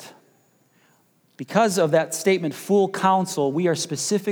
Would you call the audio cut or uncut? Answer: uncut